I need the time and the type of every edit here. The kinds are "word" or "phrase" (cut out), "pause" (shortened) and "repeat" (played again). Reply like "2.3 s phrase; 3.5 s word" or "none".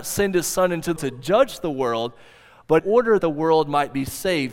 1.0 s word; 2.8 s word; 3.2 s word